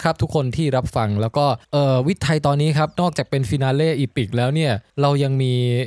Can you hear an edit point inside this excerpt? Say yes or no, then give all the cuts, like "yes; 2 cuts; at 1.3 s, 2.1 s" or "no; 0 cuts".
yes; 2 cuts; at 1.6 s, 4.9 s